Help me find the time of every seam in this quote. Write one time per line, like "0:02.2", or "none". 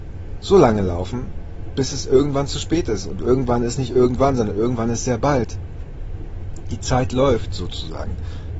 none